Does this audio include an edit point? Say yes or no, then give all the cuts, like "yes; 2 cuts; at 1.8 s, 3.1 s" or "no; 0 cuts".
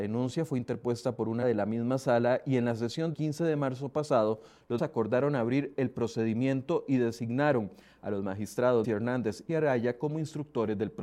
yes; 5 cuts; at 1.4 s, 3.1 s, 4.8 s, 8.8 s, 9.5 s